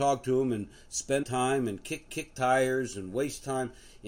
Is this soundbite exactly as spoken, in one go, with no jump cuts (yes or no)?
no